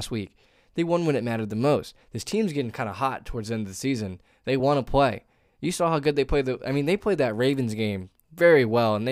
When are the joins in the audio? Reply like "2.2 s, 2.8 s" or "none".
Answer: none

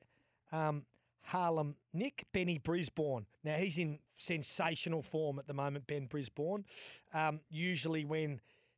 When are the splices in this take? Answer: 1.8 s, 3.3 s, 4.1 s

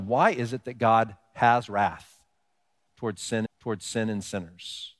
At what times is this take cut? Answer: 3.5 s

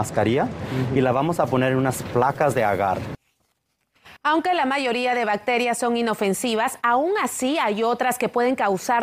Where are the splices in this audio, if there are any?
4.2 s

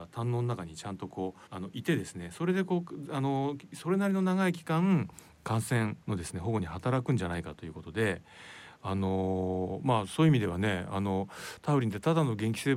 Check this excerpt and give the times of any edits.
1.5 s, 6.0 s

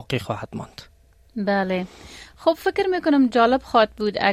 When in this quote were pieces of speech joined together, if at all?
none

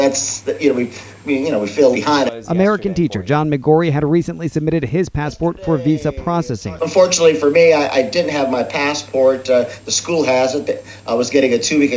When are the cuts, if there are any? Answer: 1.9 s

